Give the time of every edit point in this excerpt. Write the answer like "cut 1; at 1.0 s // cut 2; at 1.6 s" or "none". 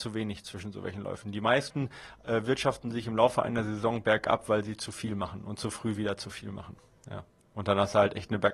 none